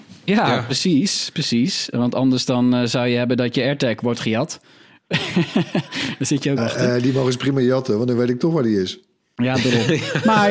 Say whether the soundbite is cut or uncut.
cut